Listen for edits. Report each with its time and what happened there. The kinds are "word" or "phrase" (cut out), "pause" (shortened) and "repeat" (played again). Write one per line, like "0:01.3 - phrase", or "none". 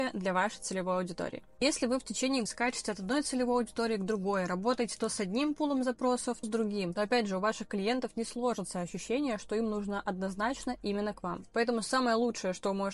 0:02.5 - word
0:06.4 - word